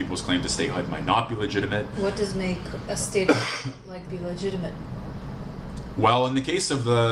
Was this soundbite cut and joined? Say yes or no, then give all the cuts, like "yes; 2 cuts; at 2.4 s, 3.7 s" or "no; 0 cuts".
yes; 1 cut; at 4.1 s